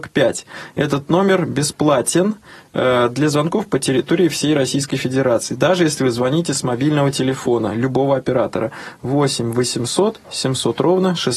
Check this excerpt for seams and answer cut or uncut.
uncut